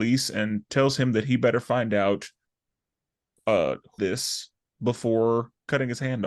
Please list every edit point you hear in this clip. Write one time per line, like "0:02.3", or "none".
0:04.0